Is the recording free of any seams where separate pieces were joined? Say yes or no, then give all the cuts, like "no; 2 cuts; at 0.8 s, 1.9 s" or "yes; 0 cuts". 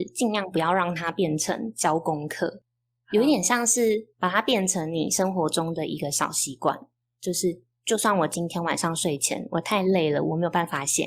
no; 1 cut; at 4.1 s